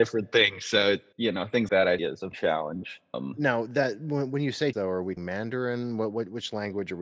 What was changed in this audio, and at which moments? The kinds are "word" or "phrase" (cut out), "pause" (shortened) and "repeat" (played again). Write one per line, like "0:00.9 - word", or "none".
0:01.1 - word
0:01.7 - word
0:02.0 - word
0:02.3 - word
0:03.1 - word
0:04.7 - word
0:05.2 - word